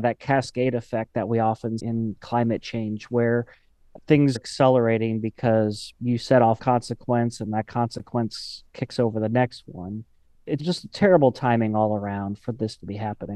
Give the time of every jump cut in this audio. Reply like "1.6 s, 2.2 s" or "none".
1.8 s, 4.3 s, 6.6 s, 10.6 s